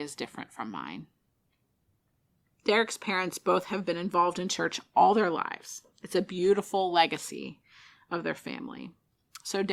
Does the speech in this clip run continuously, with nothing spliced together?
yes; 0 cuts

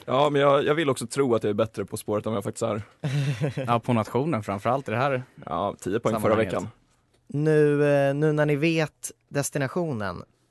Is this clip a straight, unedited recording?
no; 2 cuts; at 1.9 s, 9.2 s

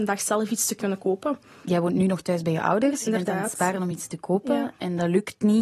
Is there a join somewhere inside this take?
no; 0 cuts

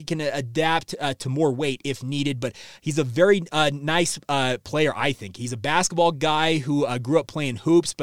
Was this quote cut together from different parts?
no; 0 cuts

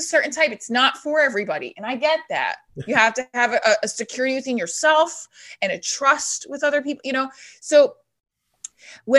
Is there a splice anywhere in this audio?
no; 0 cuts

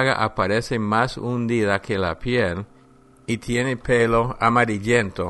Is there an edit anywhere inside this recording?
no; 0 cuts

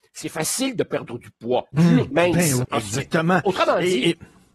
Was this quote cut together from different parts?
yes; 3 cuts; at 1.7 s, 2.1 s, 2.6 s

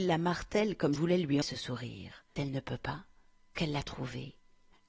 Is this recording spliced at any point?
yes; 4 cuts; at 1.0 s, 1.4 s, 2.4 s, 3.6 s

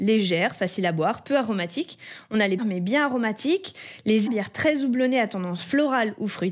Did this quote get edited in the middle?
yes; 2 cuts; at 2.6 s, 4.3 s

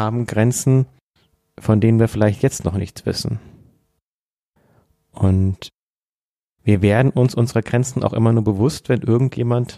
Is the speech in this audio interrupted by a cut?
no; 0 cuts

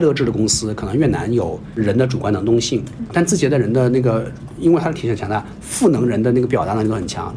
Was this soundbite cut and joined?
yes; 1 cut; at 3.1 s

